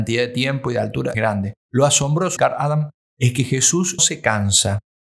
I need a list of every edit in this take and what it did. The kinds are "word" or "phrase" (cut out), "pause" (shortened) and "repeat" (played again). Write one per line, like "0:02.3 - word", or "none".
0:01.1 - word
0:01.6 - pause
0:02.4 - word
0:04.0 - word

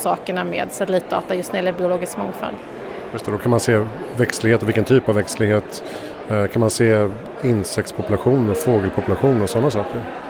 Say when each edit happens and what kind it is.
none

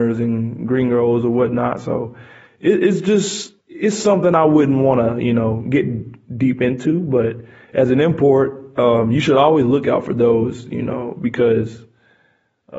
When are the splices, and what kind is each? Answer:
0:03.6 - pause

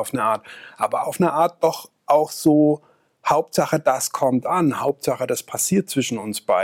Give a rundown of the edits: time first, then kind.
none

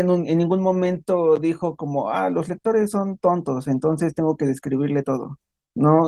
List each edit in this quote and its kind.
none

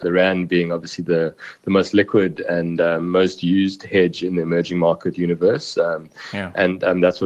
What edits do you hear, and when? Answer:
none

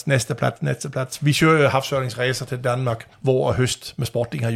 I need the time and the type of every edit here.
0:03.1 - pause

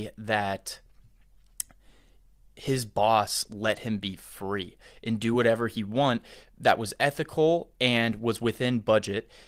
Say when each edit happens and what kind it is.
none

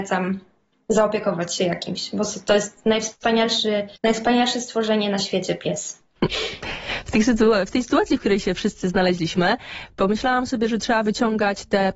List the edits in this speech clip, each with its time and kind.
0:04.0 - pause

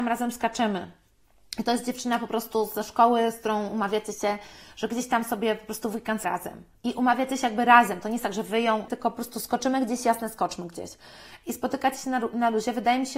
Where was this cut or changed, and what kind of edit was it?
0:06.2 - word
0:08.9 - word

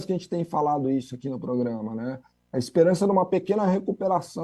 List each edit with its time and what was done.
none

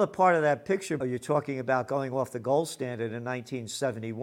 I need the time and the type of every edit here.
0:01.0 - phrase

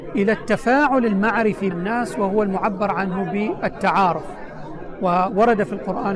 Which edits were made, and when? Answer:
0:01.7 - word

